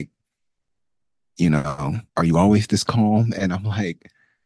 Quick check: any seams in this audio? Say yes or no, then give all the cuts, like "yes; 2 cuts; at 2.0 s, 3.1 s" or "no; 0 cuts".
yes; 1 cut; at 2.1 s